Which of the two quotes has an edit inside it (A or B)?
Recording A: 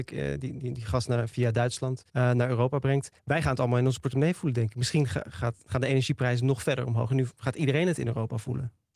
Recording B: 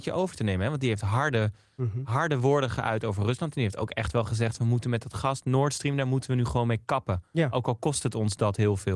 A